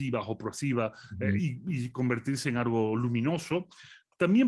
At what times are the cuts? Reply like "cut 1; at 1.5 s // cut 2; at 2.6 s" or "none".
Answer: none